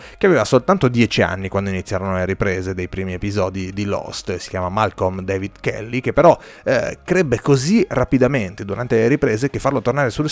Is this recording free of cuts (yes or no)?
yes